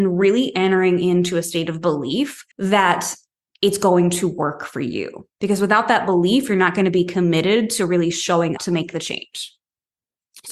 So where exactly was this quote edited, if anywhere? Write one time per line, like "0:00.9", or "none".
0:02.5
0:08.6